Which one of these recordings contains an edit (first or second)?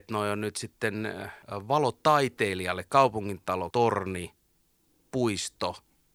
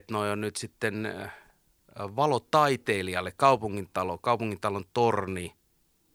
first